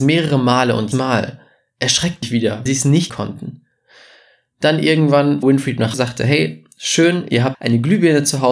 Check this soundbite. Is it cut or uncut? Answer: cut